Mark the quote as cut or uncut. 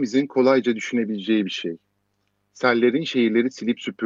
uncut